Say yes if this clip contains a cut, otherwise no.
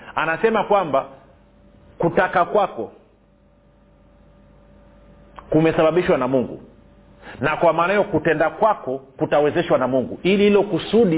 no